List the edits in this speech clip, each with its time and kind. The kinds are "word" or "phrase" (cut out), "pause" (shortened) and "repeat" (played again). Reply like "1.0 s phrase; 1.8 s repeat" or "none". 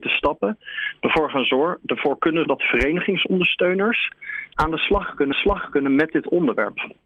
2.4 s word; 4.5 s word; 5.3 s repeat